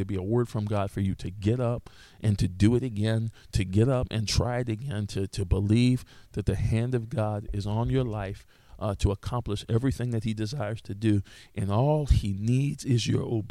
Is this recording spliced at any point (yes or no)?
no